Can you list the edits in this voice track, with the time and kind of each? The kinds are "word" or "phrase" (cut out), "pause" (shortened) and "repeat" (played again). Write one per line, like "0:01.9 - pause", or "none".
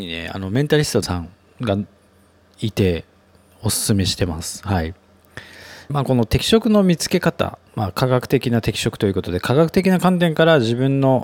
0:01.0 - word
0:05.9 - word
0:07.7 - pause